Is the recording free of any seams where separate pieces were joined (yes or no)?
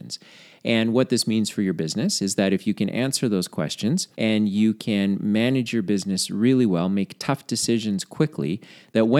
no